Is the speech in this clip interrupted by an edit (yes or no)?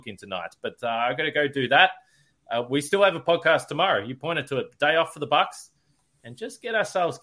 no